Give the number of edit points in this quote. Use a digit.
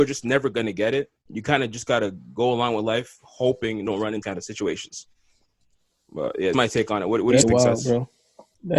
5